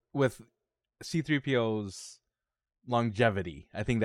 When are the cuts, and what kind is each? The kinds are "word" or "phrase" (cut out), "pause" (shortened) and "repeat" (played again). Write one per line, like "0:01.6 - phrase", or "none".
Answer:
none